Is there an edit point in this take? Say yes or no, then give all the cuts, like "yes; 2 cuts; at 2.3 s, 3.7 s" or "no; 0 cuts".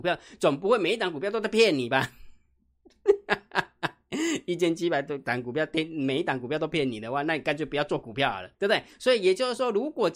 yes; 1 cut; at 8.5 s